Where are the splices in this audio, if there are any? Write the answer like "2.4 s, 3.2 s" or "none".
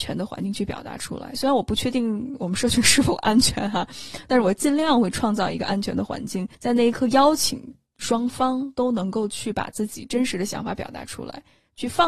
6.5 s